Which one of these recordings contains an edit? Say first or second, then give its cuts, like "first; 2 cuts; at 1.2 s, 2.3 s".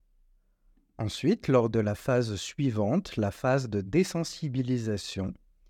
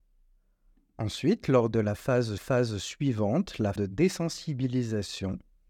second; 2 cuts; at 2.4 s, 3.8 s